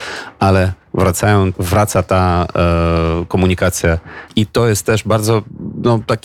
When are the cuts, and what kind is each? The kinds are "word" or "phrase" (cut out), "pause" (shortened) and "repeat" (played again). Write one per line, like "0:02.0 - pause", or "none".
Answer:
0:01.5 - word
0:04.3 - word